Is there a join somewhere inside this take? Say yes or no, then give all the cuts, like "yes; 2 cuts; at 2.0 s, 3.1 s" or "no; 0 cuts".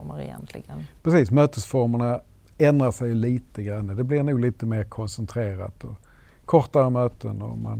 no; 0 cuts